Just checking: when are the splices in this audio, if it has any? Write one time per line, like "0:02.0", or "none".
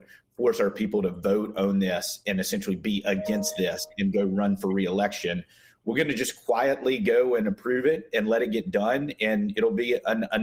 none